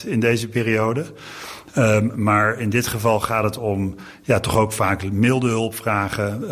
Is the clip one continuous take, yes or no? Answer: yes